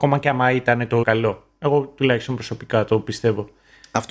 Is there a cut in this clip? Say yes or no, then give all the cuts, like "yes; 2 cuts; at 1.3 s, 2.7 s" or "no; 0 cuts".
yes; 1 cut; at 1.0 s